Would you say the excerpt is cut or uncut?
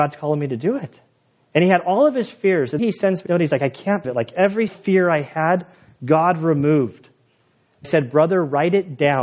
cut